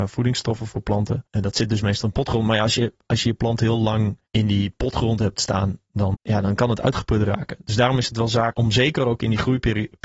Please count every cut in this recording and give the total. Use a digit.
4